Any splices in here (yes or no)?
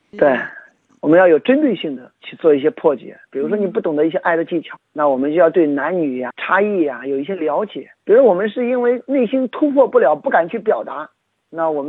yes